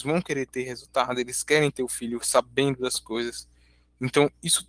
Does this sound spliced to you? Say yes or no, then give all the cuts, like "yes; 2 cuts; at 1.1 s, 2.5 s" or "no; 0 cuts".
no; 0 cuts